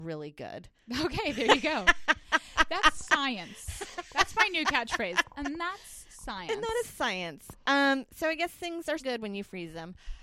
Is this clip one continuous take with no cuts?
no; 1 cut; at 9.0 s

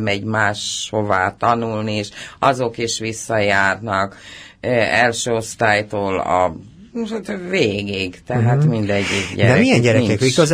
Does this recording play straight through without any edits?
yes; 0 cuts

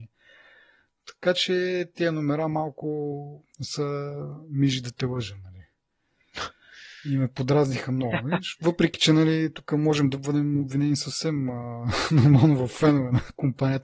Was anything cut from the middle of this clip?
yes; 1 cut; at 3.5 s

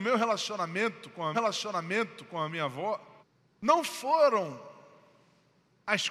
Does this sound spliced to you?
yes; 2 cuts; at 1.3 s, 3.2 s

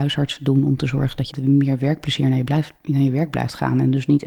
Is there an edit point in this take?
yes; 1 cut; at 1.3 s

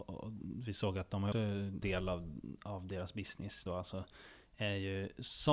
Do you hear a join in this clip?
yes; 3 cuts; at 1.3 s, 1.8 s, 3.7 s

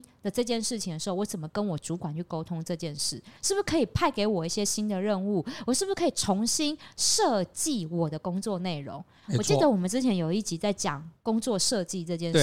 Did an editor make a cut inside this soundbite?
yes; 1 cut; at 3.4 s

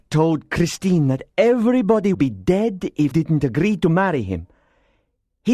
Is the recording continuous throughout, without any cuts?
no; 2 cuts; at 2.1 s, 3.1 s

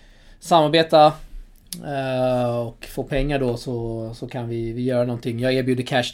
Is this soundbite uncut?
yes; 0 cuts

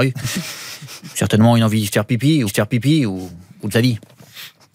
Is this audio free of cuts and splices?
no; 2 cuts; at 2.5 s, 3.7 s

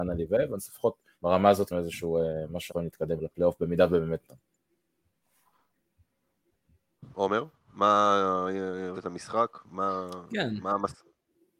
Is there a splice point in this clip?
yes; 6 cuts; at 1.1 s, 1.7 s, 2.7 s, 3.2 s, 4.2 s, 8.9 s

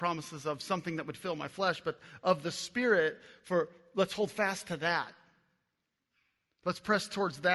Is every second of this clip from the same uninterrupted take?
yes; 0 cuts

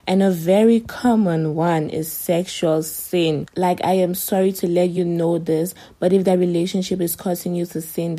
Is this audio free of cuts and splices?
yes; 0 cuts

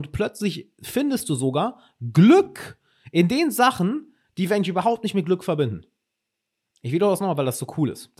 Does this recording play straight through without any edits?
yes; 0 cuts

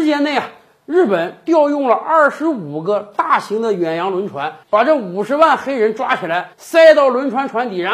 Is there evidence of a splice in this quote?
yes; 2 cuts; at 4.6 s, 6.5 s

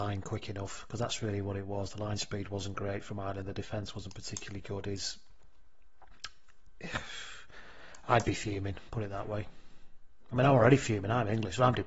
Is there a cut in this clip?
no; 0 cuts

